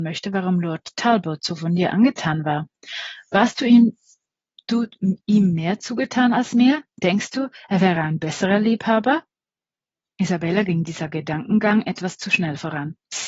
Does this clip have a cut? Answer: no; 0 cuts

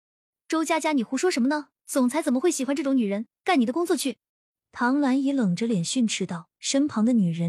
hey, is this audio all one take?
no; 4 cuts; at 1.8 s, 3.4 s, 4.3 s, 6.5 s

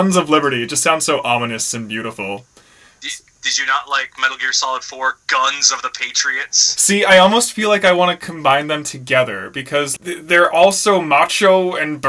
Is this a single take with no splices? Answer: no; 1 cut; at 10.0 s

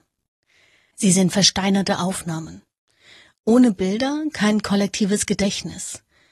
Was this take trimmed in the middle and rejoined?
no; 0 cuts

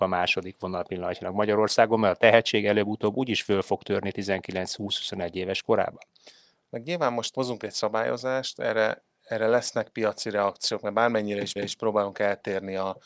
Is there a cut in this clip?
yes; 2 cuts; at 7.3 s, 11.6 s

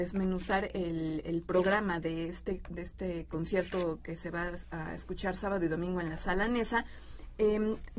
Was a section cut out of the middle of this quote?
no; 0 cuts

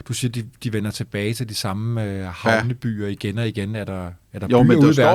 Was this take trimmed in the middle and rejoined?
no; 0 cuts

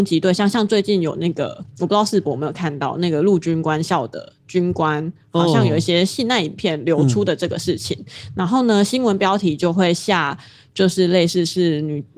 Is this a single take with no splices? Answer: no; 1 cut; at 1.7 s

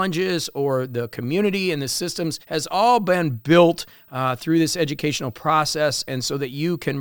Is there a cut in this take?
yes; 1 cut; at 2.4 s

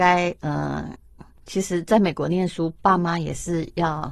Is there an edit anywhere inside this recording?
no; 0 cuts

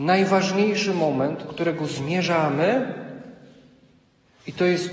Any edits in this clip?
yes; 1 cut; at 1.5 s

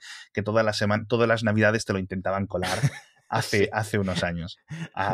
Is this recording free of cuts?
yes; 0 cuts

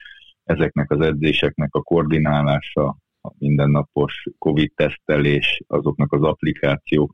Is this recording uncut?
yes; 0 cuts

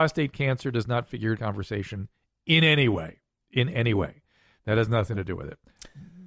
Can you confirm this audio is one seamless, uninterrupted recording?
no; 1 cut; at 1.3 s

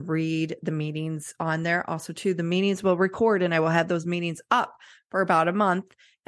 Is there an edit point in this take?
no; 0 cuts

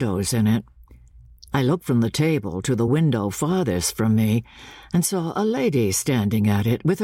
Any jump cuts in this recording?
no; 0 cuts

